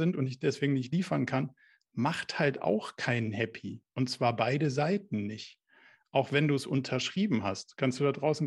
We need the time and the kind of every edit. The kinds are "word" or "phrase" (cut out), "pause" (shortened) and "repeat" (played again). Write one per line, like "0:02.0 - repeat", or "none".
none